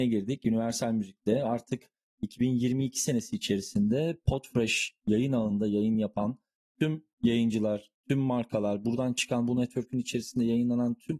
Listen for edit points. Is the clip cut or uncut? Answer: uncut